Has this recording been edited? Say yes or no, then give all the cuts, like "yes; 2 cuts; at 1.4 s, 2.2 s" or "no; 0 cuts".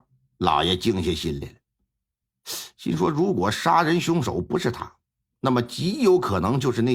no; 0 cuts